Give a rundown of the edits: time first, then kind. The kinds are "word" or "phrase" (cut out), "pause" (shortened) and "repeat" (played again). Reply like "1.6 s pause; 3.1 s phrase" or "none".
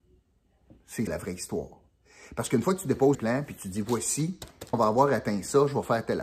1.1 s word; 3.1 s word; 4.7 s word